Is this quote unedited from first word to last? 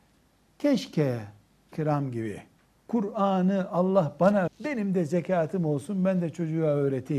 no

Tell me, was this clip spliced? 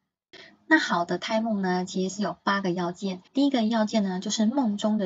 yes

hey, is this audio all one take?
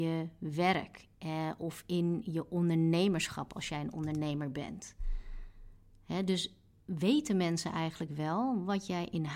yes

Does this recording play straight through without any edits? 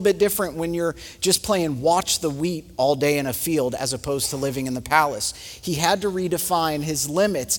yes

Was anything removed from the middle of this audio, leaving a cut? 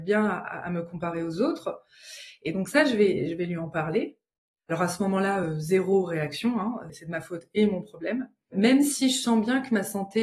no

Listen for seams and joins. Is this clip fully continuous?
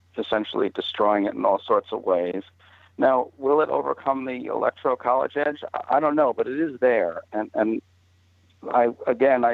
yes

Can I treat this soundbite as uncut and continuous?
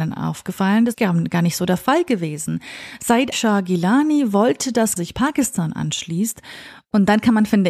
no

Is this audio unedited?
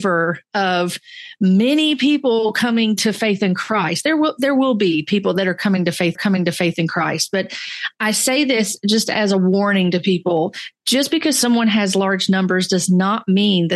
no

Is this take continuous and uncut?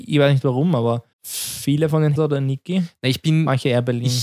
no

